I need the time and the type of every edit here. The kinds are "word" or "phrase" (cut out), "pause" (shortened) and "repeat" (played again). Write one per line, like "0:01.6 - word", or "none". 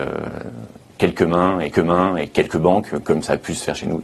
0:01.7 - repeat